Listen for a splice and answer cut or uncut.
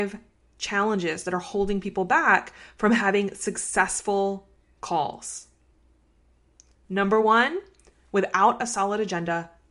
uncut